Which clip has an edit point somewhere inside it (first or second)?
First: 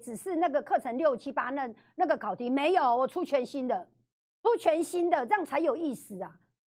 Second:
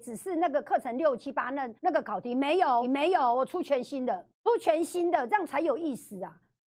second